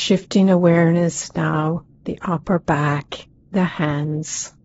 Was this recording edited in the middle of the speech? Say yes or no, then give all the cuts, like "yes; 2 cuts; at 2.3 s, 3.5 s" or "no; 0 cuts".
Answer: yes; 2 cuts; at 2.1 s, 3.5 s